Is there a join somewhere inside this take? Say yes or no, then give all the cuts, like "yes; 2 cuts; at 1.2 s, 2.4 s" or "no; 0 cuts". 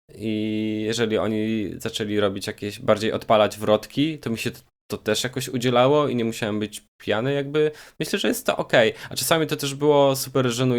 no; 0 cuts